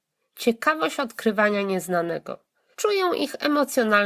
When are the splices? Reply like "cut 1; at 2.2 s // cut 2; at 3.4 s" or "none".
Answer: none